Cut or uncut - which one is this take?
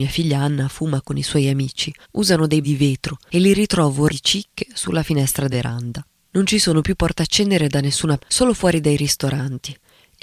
cut